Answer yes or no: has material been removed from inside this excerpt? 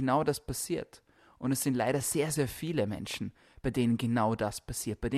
no